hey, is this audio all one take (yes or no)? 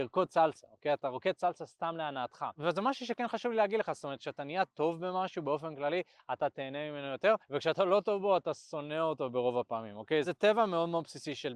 no